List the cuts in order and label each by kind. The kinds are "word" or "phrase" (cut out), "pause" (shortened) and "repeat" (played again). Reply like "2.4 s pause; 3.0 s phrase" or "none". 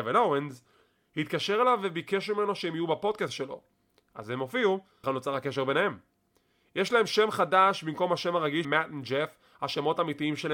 5.0 s word; 8.6 s word